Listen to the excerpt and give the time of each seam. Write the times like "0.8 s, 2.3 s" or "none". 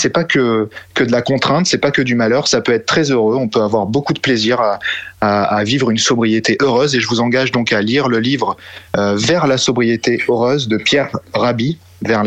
8.9 s